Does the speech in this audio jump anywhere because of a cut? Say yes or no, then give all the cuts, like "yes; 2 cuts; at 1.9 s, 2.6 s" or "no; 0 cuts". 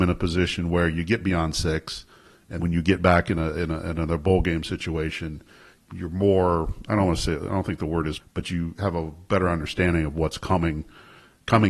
yes; 3 cuts; at 2.6 s, 5.8 s, 8.2 s